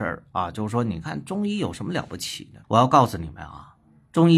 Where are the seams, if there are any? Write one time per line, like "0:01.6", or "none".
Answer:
0:02.6